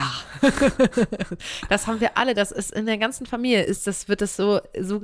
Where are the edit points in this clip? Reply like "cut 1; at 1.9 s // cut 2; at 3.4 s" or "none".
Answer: none